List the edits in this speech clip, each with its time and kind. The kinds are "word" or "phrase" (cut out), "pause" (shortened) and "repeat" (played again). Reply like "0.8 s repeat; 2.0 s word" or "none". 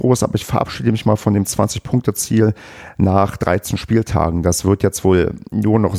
none